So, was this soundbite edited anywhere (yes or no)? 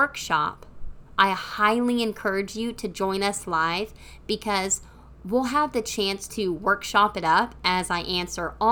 no